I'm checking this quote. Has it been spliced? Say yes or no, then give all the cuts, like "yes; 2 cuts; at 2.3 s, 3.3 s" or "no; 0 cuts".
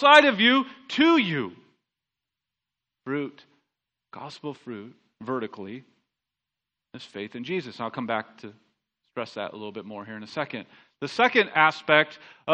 no; 0 cuts